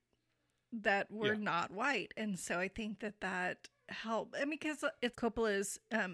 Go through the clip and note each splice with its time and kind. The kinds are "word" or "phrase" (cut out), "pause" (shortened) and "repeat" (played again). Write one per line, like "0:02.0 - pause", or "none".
0:05.1 - phrase